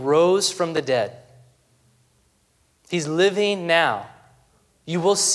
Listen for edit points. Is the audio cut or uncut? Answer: uncut